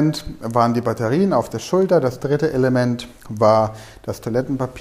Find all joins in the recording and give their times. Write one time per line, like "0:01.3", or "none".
0:03.2